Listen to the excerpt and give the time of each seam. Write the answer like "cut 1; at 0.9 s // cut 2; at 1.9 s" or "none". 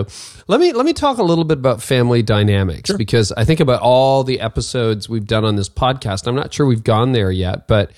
none